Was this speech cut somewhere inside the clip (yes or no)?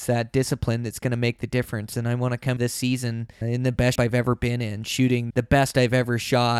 yes